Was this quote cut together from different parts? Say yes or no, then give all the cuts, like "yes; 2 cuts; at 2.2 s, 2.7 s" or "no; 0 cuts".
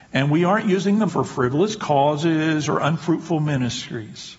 yes; 1 cut; at 1.1 s